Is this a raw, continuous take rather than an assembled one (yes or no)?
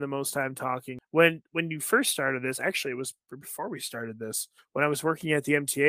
yes